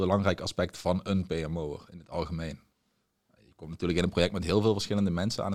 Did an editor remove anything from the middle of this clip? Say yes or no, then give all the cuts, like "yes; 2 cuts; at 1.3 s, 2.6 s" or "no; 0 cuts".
no; 0 cuts